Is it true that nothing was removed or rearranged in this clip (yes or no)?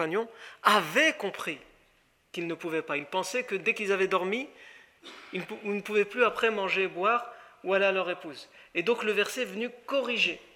yes